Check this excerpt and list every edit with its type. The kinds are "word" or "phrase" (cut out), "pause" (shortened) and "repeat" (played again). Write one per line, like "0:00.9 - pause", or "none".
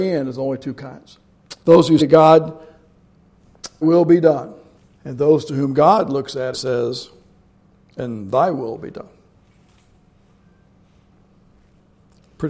0:01.6 - pause
0:02.0 - word
0:03.8 - word
0:04.8 - pause
0:06.5 - word